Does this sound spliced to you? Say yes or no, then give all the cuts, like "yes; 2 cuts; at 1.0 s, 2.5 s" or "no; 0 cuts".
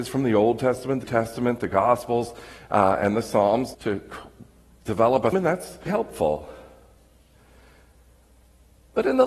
yes; 4 cuts; at 1.0 s, 3.7 s, 5.3 s, 5.9 s